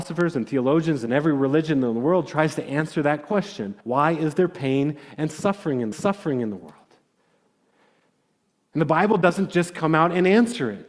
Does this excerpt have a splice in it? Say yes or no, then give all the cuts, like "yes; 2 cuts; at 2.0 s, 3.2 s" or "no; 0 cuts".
yes; 2 cuts; at 3.8 s, 5.9 s